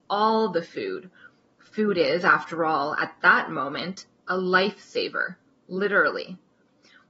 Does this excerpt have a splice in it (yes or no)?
no